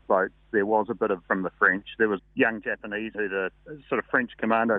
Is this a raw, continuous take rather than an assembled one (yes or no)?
no